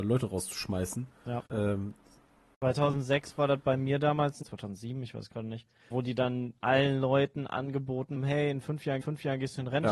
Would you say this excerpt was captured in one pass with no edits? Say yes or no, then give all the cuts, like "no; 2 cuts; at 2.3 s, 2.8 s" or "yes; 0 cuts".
no; 6 cuts; at 1.5 s, 4.4 s, 5.9 s, 6.6 s, 8.2 s, 9.0 s